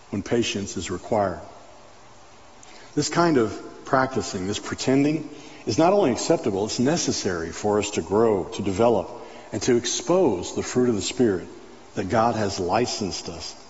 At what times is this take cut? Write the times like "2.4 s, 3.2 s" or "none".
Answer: none